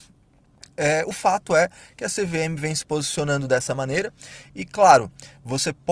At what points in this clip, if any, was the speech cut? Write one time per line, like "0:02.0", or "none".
none